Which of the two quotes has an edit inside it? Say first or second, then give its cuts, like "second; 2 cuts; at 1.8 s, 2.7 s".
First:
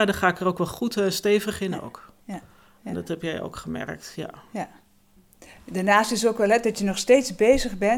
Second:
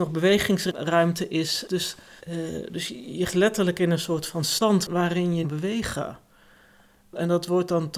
second; 3 cuts; at 2.2 s, 3.3 s, 5.4 s